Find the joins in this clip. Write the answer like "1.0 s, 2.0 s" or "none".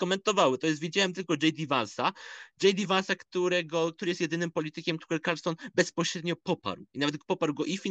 5.0 s